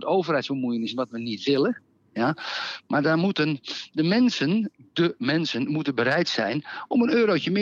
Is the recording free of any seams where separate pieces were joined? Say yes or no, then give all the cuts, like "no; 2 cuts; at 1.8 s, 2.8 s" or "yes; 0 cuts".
yes; 0 cuts